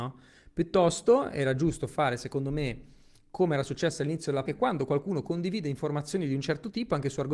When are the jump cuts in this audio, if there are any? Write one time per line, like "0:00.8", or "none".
0:04.4